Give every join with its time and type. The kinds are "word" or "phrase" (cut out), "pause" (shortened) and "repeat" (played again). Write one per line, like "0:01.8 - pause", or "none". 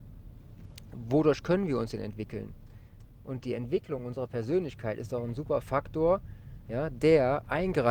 none